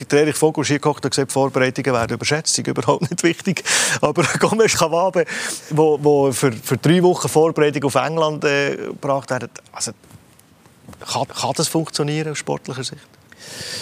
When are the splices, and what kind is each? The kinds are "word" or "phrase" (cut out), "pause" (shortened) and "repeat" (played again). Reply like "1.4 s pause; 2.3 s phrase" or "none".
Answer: 4.7 s word; 11.3 s repeat